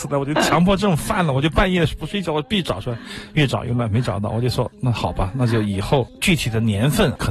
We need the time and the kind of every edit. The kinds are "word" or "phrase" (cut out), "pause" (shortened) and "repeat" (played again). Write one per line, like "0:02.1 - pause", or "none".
none